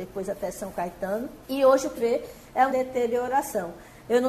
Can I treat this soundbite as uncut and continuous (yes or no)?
no